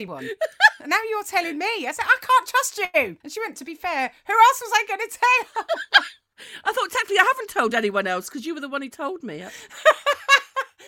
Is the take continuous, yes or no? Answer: no